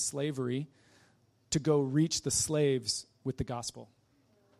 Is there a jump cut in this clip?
no; 0 cuts

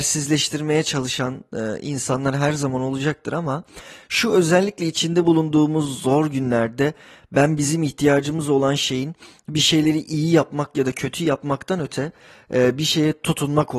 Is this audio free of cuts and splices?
yes; 0 cuts

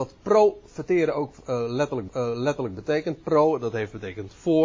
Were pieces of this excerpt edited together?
yes; 1 cut; at 2.1 s

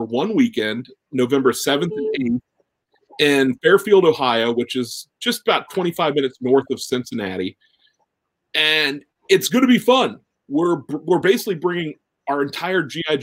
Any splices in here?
no; 0 cuts

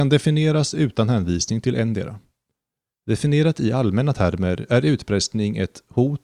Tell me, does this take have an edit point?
no; 0 cuts

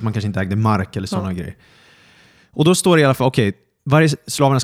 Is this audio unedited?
yes; 0 cuts

